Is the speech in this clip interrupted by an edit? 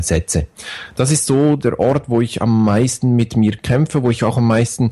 no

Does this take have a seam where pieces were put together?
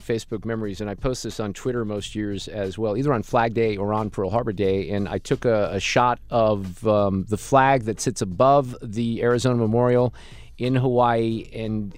no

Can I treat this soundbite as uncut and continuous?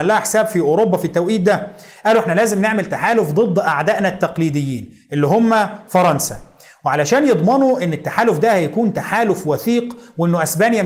yes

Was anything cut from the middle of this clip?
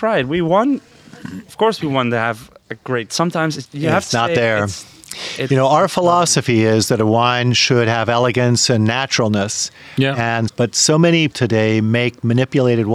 yes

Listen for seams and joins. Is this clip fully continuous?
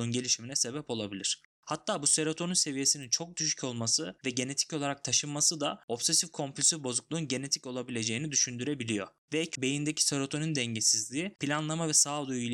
no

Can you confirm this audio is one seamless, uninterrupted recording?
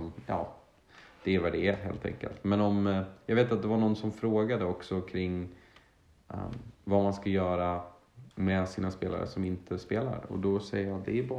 no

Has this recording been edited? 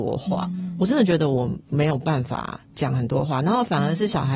yes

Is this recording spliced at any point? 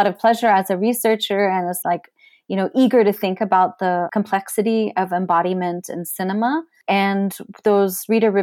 yes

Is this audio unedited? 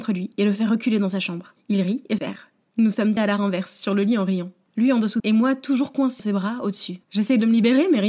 no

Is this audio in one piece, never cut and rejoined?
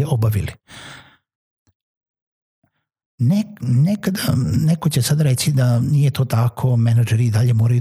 yes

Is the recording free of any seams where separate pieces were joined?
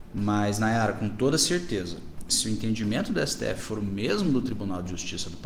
yes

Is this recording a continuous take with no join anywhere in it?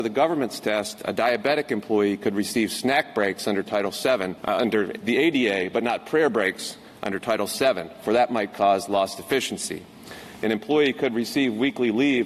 no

